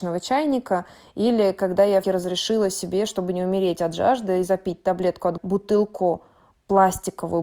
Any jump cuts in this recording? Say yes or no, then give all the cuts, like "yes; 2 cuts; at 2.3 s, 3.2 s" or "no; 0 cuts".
yes; 2 cuts; at 2.0 s, 5.4 s